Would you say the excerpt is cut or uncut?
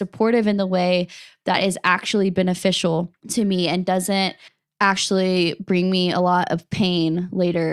cut